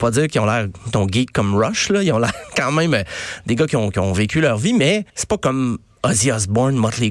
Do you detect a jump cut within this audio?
yes; 1 cut; at 5.1 s

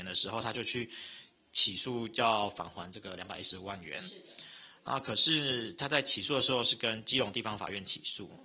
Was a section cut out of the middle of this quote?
no; 0 cuts

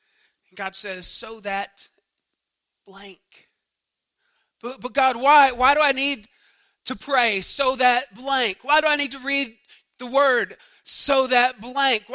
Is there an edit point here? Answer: no; 0 cuts

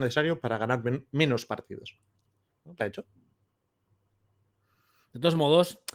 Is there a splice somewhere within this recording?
yes; 1 cut; at 2.8 s

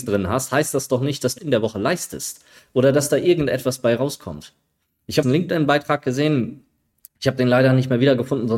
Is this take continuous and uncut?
no; 2 cuts; at 1.4 s, 5.2 s

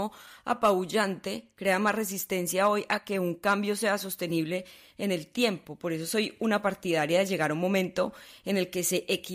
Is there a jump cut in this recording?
no; 0 cuts

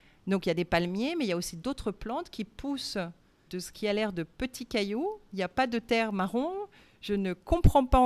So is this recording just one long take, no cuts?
no; 1 cut; at 3.5 s

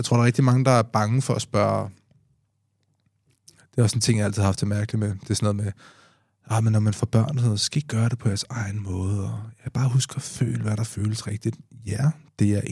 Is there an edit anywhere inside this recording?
no; 0 cuts

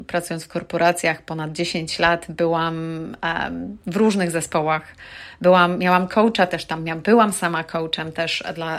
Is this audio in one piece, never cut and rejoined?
yes; 0 cuts

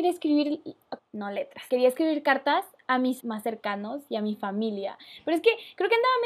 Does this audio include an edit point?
yes; 3 cuts; at 1.0 s, 1.7 s, 3.2 s

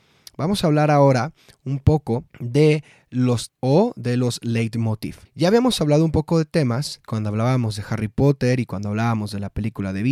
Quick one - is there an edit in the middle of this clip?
yes; 4 cuts; at 2.3 s, 3.5 s, 5.3 s, 7.0 s

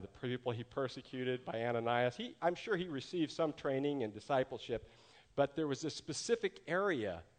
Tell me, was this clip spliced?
no; 0 cuts

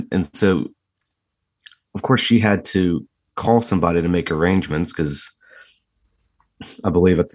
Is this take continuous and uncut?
yes; 0 cuts

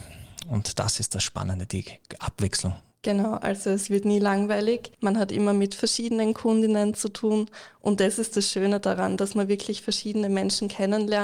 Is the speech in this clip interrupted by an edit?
yes; 2 cuts; at 2.9 s, 4.9 s

